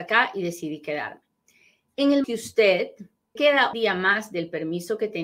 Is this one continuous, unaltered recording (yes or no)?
no